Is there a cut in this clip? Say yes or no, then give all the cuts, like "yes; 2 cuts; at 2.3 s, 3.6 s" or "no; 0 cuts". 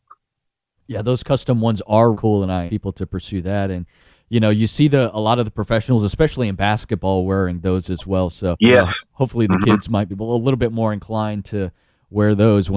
yes; 4 cuts; at 2.1 s, 2.7 s, 8.5 s, 10.1 s